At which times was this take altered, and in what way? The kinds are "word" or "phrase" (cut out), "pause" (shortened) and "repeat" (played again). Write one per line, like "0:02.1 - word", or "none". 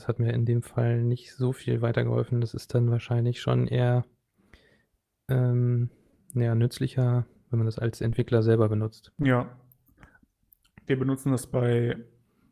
none

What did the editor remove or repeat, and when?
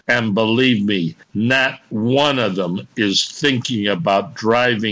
0:01.2 - pause

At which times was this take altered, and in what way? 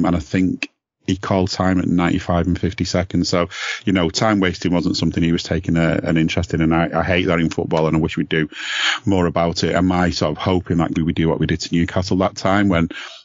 0:10.9 - phrase

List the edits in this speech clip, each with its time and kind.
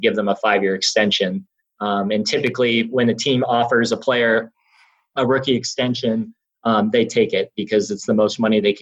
none

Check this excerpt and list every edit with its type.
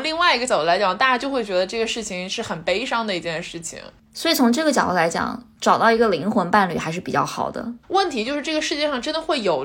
0:07.8 - pause

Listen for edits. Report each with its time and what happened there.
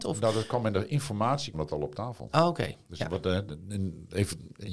0:01.5 - word
0:03.5 - word

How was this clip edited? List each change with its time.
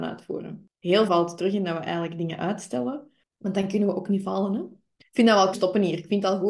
0:01.1 - word
0:05.5 - word

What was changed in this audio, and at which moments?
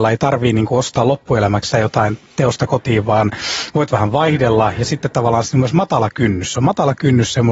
0:01.7 - word

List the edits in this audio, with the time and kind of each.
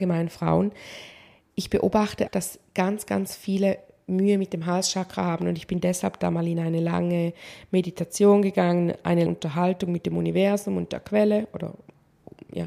0:02.3 - word
0:09.3 - word

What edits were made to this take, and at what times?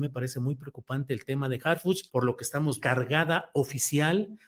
0:01.6 - word
0:02.1 - pause
0:02.8 - phrase

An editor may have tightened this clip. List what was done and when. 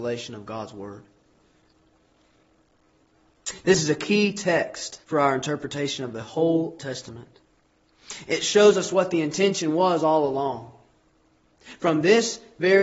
0:05.0 - pause
0:06.8 - word

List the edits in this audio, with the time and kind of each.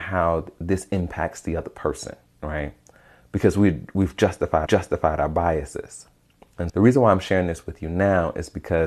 0:04.7 - repeat
0:06.7 - word

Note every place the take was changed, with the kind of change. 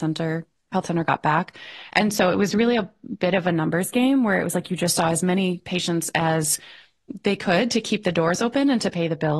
none

